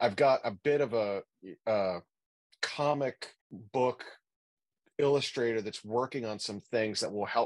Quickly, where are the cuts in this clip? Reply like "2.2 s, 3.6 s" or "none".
3.4 s